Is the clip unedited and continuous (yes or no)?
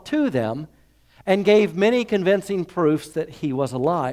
yes